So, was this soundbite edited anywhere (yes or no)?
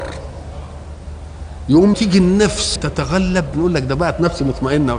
yes